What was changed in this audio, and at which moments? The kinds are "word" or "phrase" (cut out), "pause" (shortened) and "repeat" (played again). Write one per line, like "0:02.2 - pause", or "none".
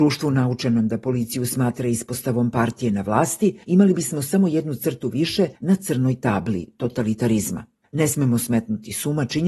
0:03.6 - pause
0:05.6 - pause
0:07.8 - pause

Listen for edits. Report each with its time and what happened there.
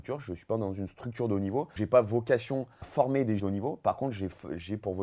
0:01.8 - word
0:02.8 - word
0:03.4 - word

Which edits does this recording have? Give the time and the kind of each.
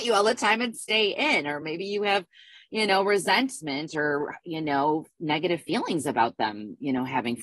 none

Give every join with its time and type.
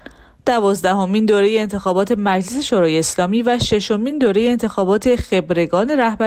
none

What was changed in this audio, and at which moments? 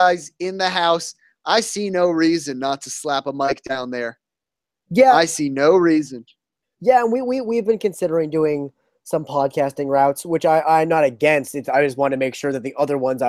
0:06.6 - pause
0:11.6 - word

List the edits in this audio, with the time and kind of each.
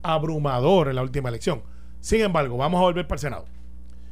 none

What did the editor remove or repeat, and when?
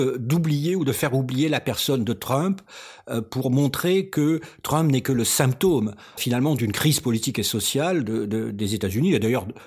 0:06.2 - word

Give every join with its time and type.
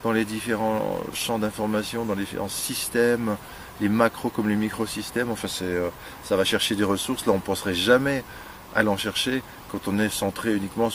none

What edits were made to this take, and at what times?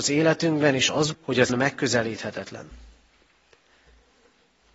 0:01.1 - word
0:01.5 - word

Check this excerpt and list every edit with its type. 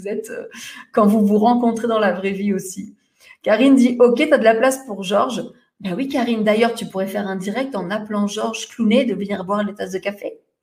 none

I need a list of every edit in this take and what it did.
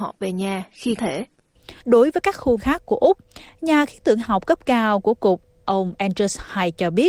0:01.0 - word
0:01.8 - pause
0:02.6 - word
0:05.6 - word

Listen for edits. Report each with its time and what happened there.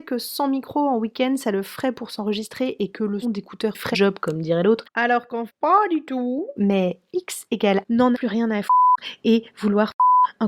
0:03.2 - word
0:03.9 - word
0:05.5 - word
0:08.1 - word

